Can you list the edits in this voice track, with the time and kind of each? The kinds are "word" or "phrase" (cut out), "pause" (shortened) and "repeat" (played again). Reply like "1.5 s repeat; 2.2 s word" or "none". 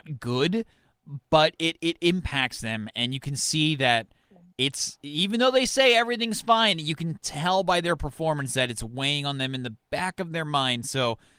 none